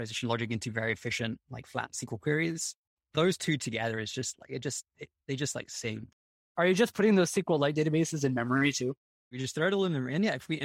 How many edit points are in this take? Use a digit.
0